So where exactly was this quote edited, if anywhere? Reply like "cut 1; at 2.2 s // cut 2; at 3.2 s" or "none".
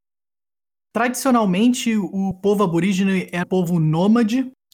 cut 1; at 3.4 s